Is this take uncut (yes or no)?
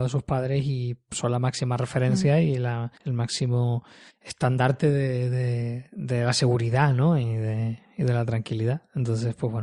no